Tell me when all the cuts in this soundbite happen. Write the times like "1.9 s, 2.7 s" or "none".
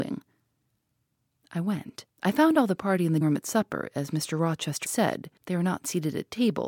2.1 s, 3.2 s, 4.8 s, 5.4 s